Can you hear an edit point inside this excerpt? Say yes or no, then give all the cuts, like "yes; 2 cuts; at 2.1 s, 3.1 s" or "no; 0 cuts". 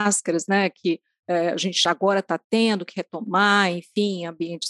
no; 0 cuts